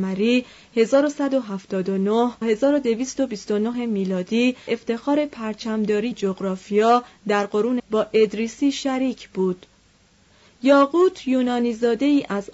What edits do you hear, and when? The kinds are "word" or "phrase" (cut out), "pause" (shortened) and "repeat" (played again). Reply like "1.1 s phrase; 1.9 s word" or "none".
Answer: 2.4 s word; 4.7 s word; 6.1 s word; 7.8 s word